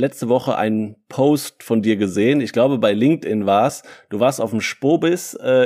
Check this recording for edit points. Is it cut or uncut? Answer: uncut